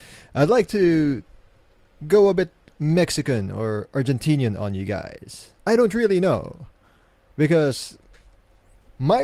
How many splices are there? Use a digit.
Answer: 1